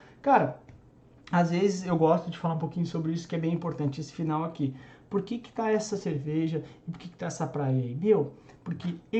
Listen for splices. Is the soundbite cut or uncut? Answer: uncut